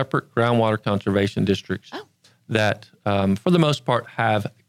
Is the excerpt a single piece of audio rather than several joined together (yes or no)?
yes